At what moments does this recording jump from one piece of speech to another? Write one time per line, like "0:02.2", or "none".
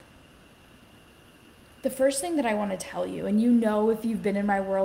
none

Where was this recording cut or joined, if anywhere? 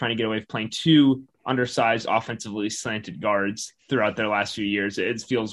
0:03.8

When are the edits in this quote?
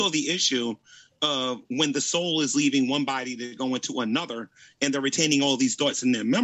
none

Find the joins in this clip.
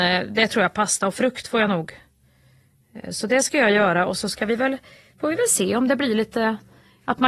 none

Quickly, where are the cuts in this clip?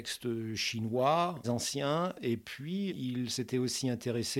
0:01.4
0:02.9

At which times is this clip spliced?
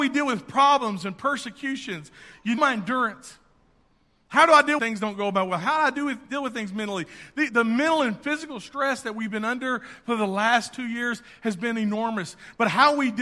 0:02.6
0:04.8
0:07.5

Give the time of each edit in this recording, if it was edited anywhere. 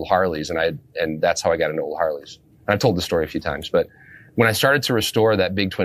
none

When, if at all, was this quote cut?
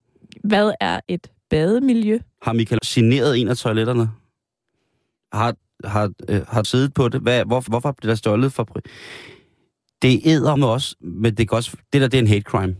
0:02.8
0:06.6
0:07.7
0:10.6

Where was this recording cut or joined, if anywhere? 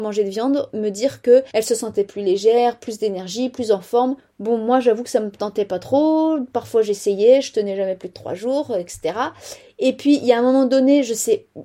0:01.5
0:04.2

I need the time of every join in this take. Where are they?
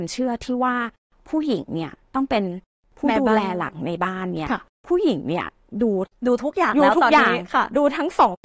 none

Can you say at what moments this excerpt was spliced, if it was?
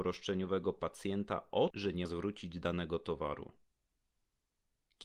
0:01.7
0:02.0

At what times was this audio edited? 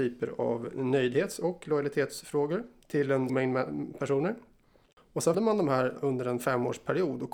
0:03.3
0:05.3
0:06.0

